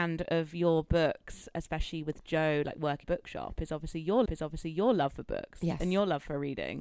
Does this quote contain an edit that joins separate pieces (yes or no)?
yes